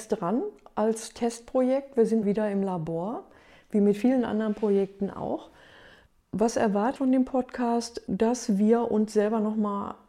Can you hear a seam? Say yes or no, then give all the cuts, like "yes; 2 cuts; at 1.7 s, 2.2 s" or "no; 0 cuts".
yes; 2 cuts; at 2.2 s, 7.0 s